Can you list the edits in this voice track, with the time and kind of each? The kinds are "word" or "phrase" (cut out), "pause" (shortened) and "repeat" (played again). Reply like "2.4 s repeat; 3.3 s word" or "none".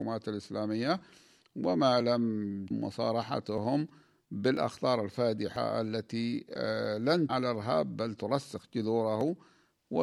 2.7 s word; 7.3 s word

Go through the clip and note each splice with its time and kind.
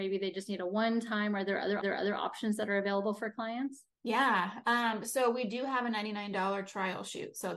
1.8 s repeat; 3.9 s pause

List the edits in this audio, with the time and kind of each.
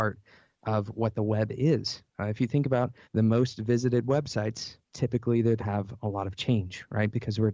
3.0 s pause; 5.6 s phrase

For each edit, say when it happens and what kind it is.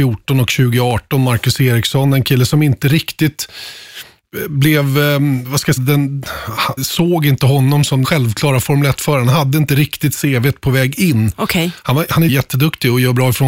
5.8 s word; 6.8 s word; 8.0 s word; 12.3 s word

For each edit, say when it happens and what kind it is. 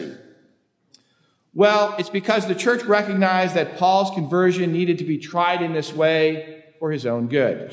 none

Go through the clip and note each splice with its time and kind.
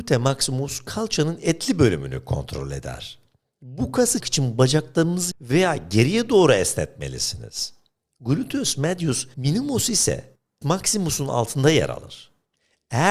4.2 s word; 5.3 s word; 9.3 s word; 10.6 s word

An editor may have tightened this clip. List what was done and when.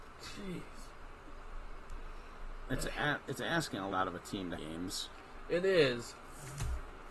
3.9 s word; 4.6 s phrase

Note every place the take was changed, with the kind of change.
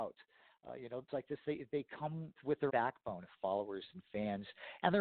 1.1 s word; 2.4 s word; 2.7 s word

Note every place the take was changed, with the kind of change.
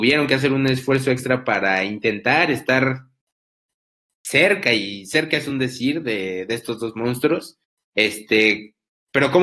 none

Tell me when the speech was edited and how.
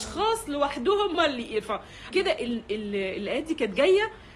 1.1 s word; 2.1 s word

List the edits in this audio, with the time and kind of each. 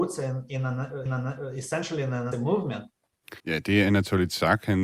1.1 s repeat; 2.3 s word; 3.4 s pause

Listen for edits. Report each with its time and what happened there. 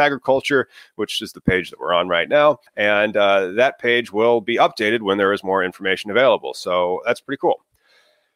2.7 s pause

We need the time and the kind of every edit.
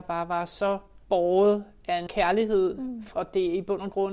1.0 s pause; 2.1 s word; 3.1 s word

